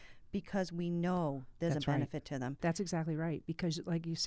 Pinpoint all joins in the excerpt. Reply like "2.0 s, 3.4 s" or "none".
none